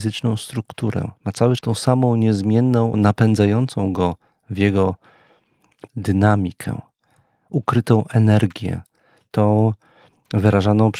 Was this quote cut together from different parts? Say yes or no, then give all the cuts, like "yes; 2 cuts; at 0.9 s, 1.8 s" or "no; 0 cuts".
yes; 4 cuts; at 1.2 s, 1.6 s, 2.9 s, 5.9 s